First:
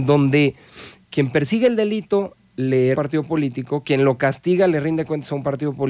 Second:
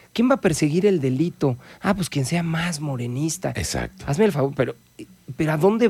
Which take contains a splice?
first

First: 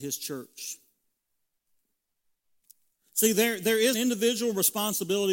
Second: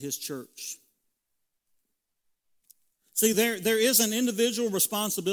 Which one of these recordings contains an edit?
first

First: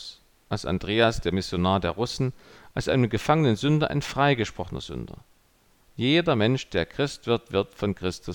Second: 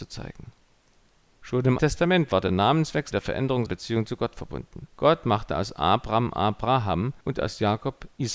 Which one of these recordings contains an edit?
second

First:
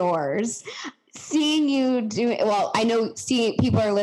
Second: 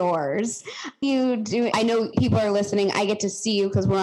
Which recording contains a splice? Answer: second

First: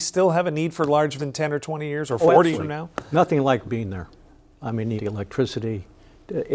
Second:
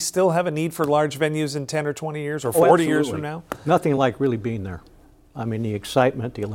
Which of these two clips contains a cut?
first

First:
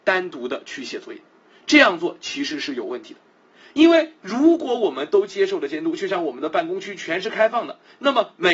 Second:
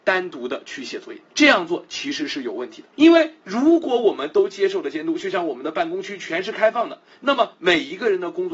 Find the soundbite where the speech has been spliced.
second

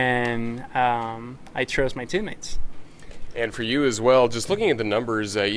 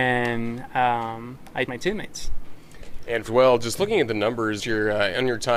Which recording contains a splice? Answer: second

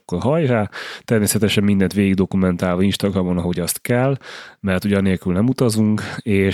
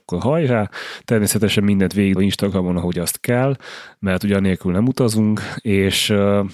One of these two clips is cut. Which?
second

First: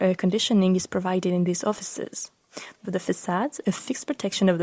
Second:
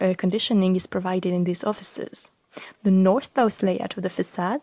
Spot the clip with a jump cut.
first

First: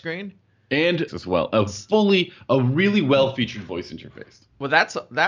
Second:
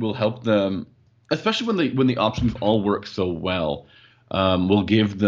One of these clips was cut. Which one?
first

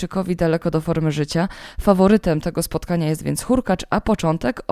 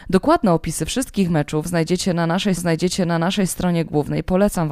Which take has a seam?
second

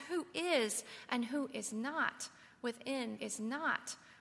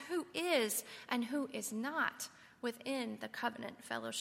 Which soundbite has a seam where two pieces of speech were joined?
first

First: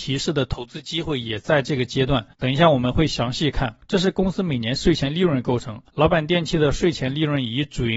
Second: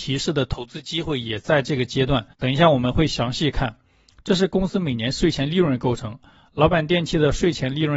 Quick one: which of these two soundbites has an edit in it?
first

